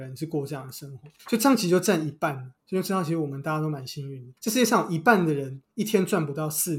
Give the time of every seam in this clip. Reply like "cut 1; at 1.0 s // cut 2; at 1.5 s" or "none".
cut 1; at 1.2 s // cut 2; at 4.4 s